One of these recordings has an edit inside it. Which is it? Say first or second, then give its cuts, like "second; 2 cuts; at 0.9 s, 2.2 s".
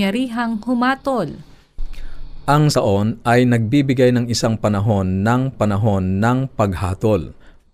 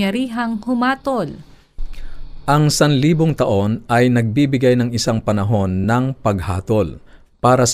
first; 2 cuts; at 2.7 s, 5.5 s